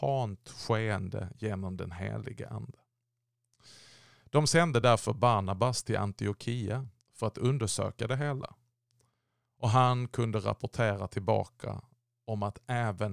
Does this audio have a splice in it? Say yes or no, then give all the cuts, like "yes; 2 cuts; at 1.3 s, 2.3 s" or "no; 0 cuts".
no; 0 cuts